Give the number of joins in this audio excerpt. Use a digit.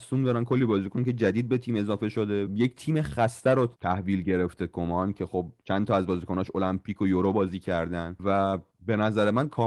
1